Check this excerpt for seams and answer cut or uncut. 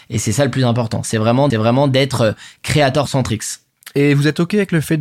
cut